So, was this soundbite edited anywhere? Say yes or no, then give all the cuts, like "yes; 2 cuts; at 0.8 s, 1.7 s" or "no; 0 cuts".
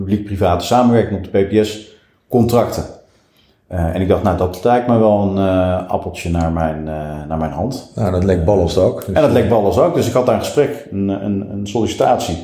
no; 0 cuts